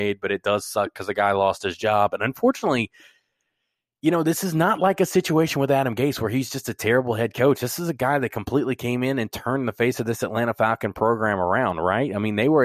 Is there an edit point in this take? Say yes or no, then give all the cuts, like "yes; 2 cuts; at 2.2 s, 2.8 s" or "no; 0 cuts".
no; 0 cuts